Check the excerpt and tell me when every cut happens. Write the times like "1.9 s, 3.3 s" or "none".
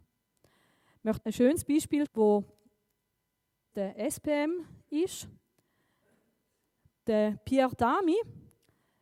1.2 s, 2.1 s, 3.7 s